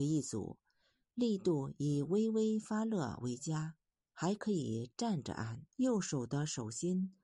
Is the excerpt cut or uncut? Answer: cut